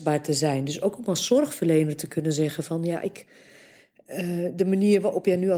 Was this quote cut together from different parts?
no; 0 cuts

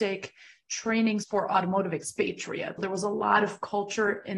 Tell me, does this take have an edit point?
yes; 2 cuts; at 1.2 s, 2.8 s

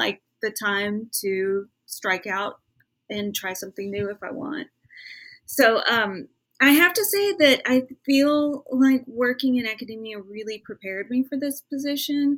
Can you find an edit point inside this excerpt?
no; 0 cuts

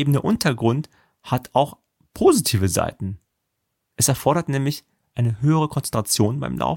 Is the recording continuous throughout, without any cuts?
yes; 0 cuts

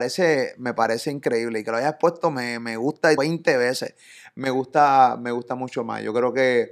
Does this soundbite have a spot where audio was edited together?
yes; 1 cut; at 3.2 s

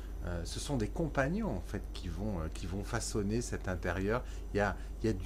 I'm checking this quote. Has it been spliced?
no; 0 cuts

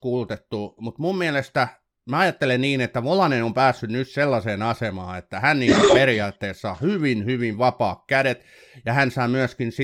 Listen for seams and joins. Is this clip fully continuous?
yes; 0 cuts

